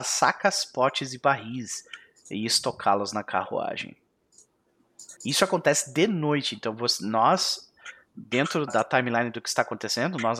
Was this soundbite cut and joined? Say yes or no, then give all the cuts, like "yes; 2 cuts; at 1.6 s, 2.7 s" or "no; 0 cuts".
yes; 2 cuts; at 5.2 s, 8.7 s